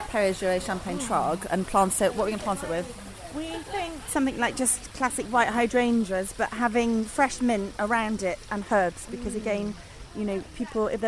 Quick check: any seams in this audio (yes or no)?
yes